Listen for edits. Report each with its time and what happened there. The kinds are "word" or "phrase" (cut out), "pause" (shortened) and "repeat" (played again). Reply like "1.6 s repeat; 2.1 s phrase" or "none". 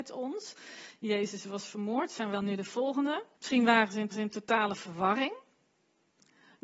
2.3 s word; 3.3 s pause; 4.1 s repeat